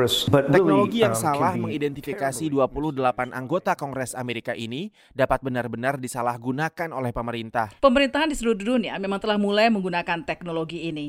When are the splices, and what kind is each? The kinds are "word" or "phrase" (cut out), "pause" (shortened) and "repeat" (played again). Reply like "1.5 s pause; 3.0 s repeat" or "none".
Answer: 7.8 s pause